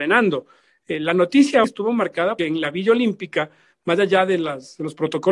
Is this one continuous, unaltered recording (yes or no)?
no